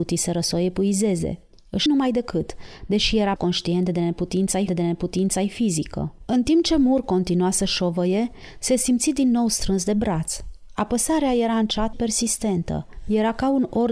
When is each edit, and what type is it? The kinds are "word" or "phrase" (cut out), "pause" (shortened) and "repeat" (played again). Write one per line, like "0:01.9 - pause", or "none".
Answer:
0:01.9 - word
0:03.4 - word
0:04.7 - repeat
0:11.9 - word